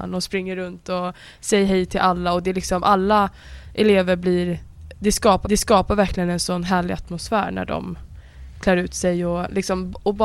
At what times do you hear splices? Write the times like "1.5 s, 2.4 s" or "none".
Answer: 5.4 s